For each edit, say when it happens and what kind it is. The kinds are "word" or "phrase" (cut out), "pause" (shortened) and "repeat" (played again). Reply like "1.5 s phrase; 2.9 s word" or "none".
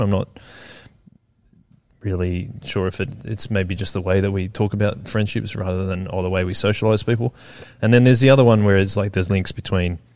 none

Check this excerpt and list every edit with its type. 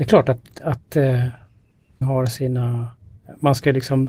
2.0 s word

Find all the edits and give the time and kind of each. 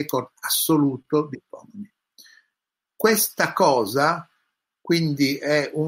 1.3 s word

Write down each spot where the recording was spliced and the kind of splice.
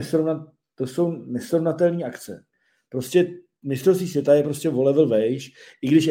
none

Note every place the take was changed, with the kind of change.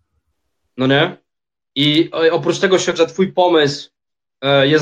2.9 s word

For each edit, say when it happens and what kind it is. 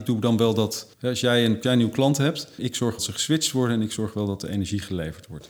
0.9 s pause; 1.6 s word; 2.6 s word; 3.0 s phrase

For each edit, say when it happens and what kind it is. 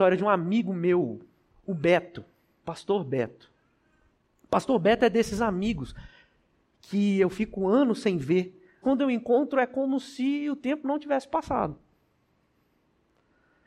8.8 s word

